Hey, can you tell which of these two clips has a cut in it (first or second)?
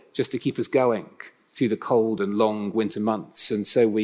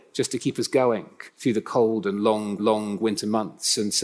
second